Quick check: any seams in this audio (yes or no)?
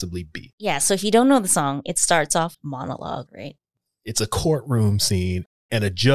yes